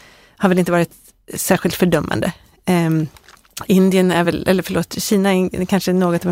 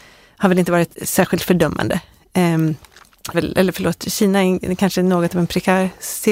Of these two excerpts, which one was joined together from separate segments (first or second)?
second